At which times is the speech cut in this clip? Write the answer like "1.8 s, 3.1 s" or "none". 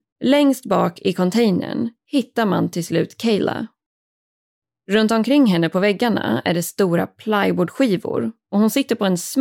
none